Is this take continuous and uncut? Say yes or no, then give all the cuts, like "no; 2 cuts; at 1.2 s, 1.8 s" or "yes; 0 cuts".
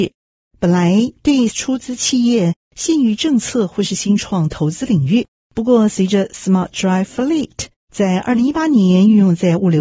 no; 1 cut; at 1.5 s